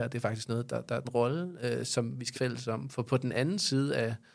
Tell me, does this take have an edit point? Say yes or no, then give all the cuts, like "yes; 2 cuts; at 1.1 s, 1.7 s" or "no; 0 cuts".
yes; 2 cuts; at 1.0 s, 2.3 s